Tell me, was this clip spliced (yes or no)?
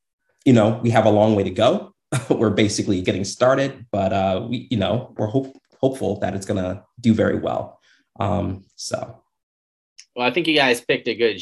yes